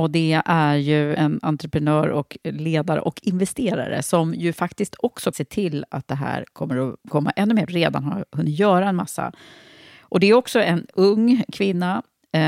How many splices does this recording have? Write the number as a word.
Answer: four